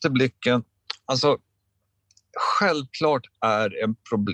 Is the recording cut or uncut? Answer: uncut